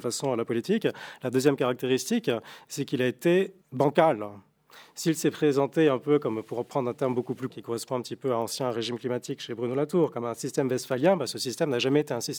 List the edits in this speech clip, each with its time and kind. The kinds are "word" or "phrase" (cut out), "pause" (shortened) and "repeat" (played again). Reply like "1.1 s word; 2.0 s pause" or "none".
3.6 s pause; 7.5 s word